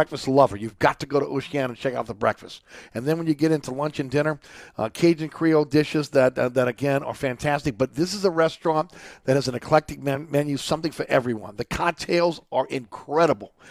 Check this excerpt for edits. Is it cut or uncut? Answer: uncut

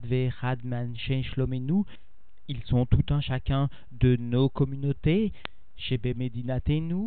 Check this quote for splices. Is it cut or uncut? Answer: uncut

